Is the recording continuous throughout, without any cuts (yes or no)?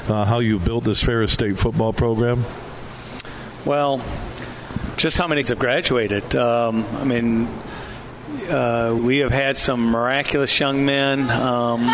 no